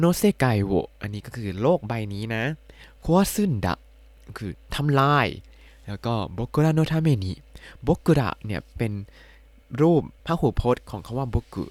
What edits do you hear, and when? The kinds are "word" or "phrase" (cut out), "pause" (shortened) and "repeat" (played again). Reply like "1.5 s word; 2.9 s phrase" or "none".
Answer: 10.2 s pause